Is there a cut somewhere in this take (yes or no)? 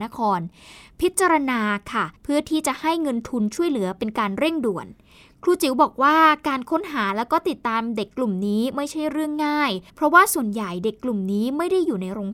yes